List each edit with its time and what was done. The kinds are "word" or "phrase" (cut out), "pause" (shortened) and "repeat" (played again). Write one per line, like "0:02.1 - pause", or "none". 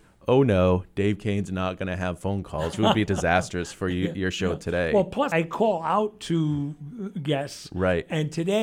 0:02.7 - word
0:03.1 - word
0:05.3 - word